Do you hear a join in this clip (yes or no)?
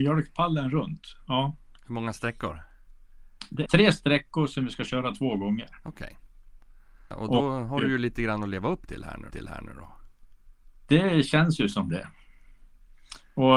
yes